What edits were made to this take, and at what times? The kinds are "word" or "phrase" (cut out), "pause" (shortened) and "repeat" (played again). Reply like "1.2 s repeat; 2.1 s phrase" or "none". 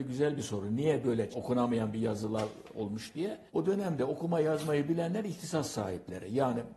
1.3 s word; 3.5 s pause